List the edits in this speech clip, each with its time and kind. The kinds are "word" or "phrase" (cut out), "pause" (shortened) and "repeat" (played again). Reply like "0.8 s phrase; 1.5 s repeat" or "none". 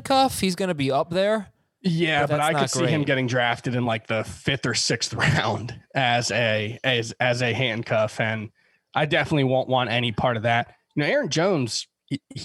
none